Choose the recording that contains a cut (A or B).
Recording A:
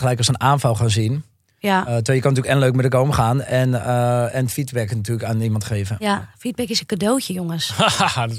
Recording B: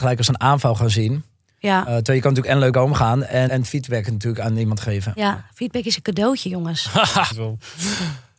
B